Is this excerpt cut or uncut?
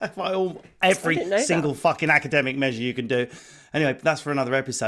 uncut